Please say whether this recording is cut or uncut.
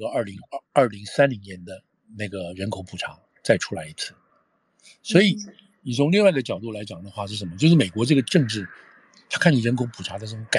uncut